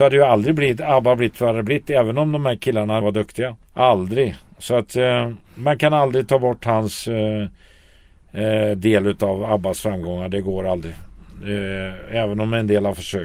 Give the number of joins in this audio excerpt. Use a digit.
3